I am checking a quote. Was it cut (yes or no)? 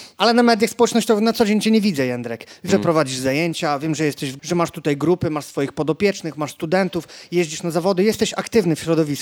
yes